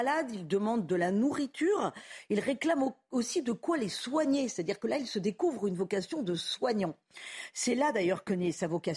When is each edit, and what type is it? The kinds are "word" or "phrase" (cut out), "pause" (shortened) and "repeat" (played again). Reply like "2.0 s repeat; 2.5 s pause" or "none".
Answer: none